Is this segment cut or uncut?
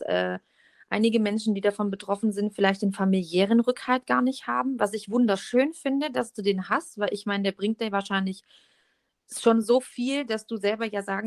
uncut